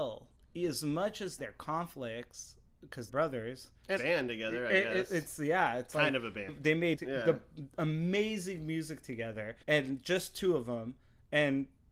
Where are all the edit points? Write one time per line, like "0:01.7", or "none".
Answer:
0:01.4
0:03.1
0:04.0
0:06.5
0:07.0
0:09.6